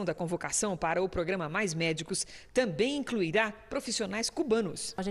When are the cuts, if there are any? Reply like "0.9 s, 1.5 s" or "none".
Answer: none